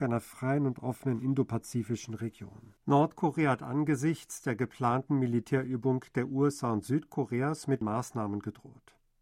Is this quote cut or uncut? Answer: cut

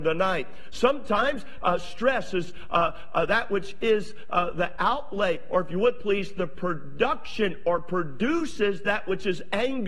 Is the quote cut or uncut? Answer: uncut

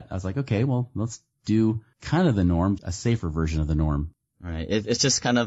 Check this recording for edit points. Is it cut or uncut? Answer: cut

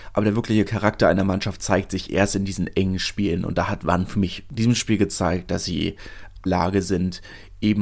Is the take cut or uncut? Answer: cut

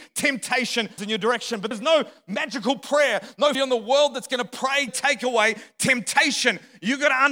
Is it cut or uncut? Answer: cut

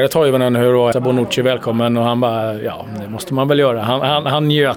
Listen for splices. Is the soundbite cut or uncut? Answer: cut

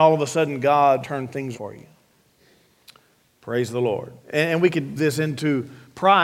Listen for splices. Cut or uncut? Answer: cut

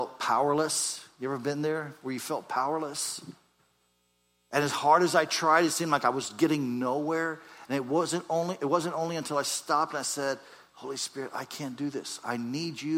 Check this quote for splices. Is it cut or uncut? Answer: uncut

